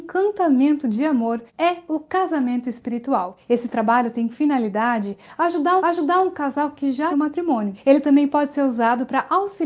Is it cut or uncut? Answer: cut